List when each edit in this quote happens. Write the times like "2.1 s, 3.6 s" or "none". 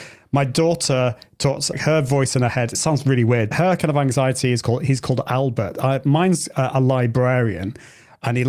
1.7 s, 2.7 s, 3.5 s